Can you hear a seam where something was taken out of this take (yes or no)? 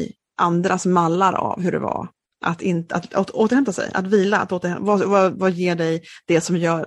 no